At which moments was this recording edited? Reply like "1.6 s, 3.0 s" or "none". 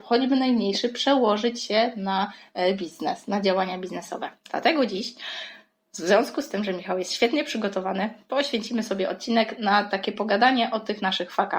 none